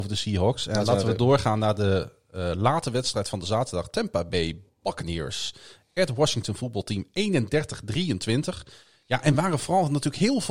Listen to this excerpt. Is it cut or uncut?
uncut